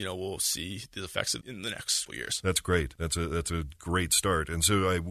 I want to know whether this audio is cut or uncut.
cut